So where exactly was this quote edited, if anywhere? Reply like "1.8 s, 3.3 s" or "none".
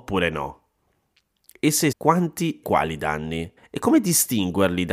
1.9 s, 2.6 s, 3.6 s